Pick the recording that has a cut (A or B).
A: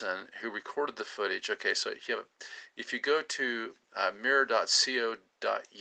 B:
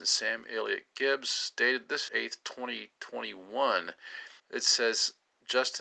B